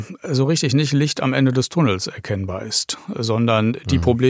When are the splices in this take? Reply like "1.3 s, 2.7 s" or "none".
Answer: none